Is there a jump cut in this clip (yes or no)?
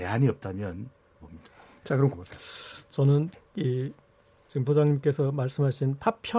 yes